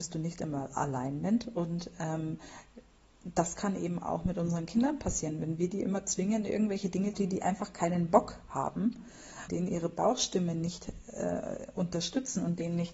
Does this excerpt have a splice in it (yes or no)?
yes